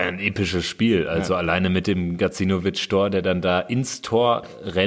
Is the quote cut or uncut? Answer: uncut